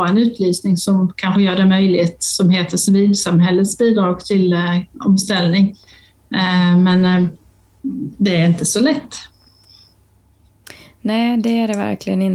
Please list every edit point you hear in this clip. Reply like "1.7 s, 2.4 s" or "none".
none